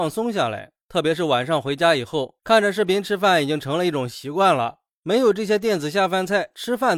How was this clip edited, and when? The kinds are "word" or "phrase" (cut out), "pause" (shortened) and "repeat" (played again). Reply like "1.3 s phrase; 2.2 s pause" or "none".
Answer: none